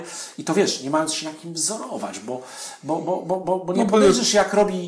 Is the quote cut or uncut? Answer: uncut